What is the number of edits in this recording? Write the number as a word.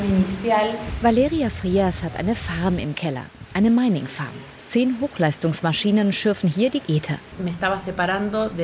one